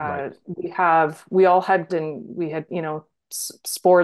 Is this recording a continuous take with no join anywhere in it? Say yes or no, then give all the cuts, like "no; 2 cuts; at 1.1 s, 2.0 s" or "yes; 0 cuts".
no; 2 cuts; at 1.9 s, 2.7 s